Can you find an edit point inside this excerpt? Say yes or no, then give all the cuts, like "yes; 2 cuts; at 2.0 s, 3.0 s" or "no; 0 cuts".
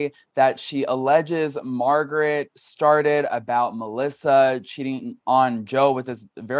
no; 0 cuts